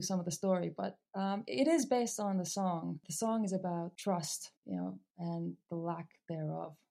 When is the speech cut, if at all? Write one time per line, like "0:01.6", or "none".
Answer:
0:04.6

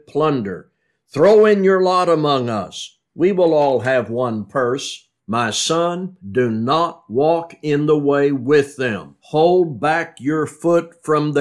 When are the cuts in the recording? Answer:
0:05.2
0:06.2
0:09.2

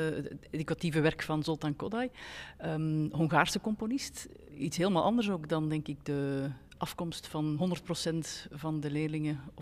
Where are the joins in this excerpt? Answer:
none

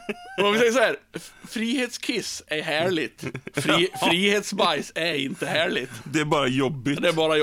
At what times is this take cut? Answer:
none

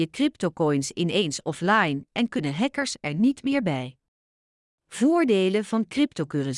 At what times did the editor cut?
none

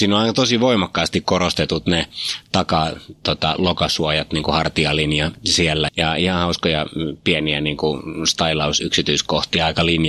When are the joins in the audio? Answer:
0:05.9

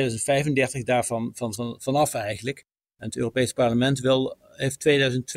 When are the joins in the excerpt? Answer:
none

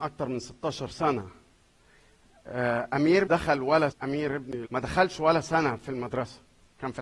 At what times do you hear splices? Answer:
0:03.3
0:03.9
0:04.6

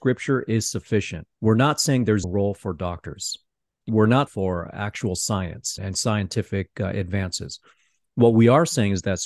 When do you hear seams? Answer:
0:01.3
0:02.2
0:03.9
0:04.3
0:05.8

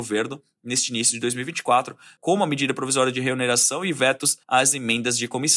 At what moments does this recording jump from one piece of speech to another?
0:04.4

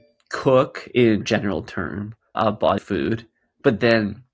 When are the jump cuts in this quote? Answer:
0:01.2
0:02.3
0:02.8

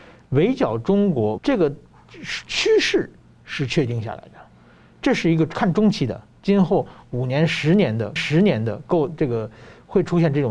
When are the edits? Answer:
0:01.4
0:08.2

